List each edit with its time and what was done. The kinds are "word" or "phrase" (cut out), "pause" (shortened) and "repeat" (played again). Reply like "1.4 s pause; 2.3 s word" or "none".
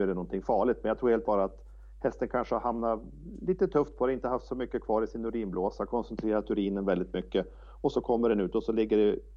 1.2 s word